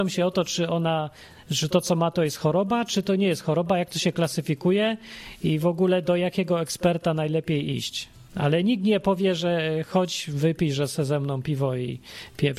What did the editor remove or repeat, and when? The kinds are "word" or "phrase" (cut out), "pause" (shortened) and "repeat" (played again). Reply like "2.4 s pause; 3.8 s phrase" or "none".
8.3 s pause